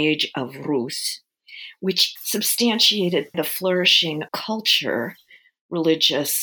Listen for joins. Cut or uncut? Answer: cut